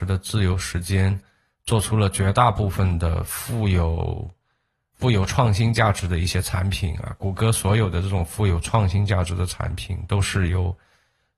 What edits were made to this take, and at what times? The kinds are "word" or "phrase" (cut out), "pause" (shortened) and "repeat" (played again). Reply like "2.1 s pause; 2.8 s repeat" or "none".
4.9 s word